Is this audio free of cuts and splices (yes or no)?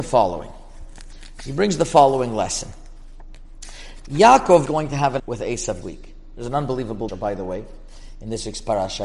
no